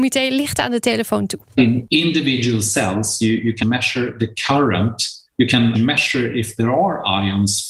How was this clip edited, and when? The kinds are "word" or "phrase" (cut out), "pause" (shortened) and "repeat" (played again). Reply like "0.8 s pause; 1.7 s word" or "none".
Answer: 1.5 s pause; 3.6 s word; 5.3 s pause; 5.7 s word